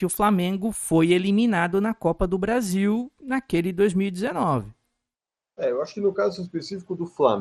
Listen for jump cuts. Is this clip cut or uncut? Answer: uncut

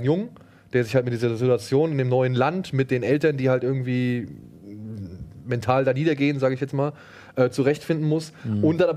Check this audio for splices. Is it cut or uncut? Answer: uncut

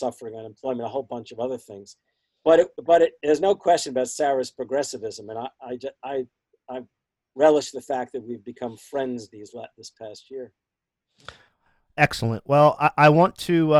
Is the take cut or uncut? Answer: uncut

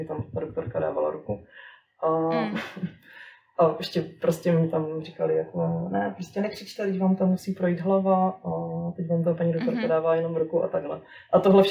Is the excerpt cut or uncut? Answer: uncut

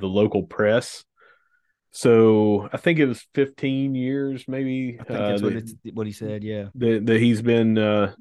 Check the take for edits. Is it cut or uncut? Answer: uncut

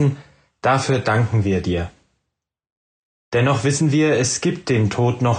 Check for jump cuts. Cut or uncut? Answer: uncut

